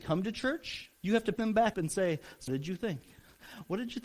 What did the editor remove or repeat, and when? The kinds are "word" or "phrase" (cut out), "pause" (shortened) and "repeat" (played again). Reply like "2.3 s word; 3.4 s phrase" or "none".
1.0 s pause; 1.4 s word; 1.7 s word; 2.5 s word